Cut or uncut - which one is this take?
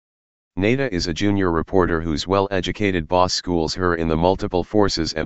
uncut